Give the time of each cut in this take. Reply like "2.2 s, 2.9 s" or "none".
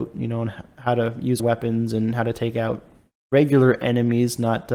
1.4 s